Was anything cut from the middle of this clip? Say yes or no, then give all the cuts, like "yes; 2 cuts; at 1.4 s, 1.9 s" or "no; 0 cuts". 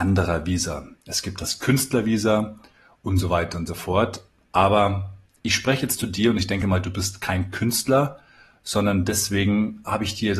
no; 0 cuts